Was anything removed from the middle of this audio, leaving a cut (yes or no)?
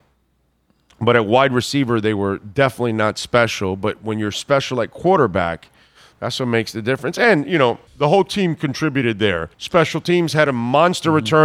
yes